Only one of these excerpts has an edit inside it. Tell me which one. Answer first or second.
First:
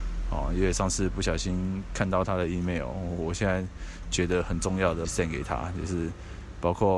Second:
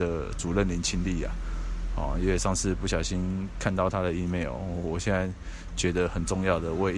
first